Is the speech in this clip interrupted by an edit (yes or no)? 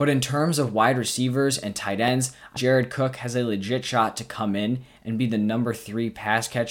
yes